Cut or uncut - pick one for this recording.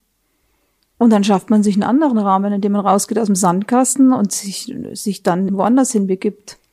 cut